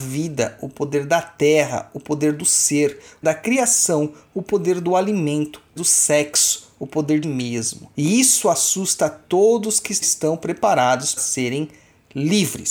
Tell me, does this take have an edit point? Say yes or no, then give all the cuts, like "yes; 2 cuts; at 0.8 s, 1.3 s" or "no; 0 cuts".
yes; 6 cuts; at 3.2 s, 5.8 s, 7.2 s, 7.9 s, 10.0 s, 11.2 s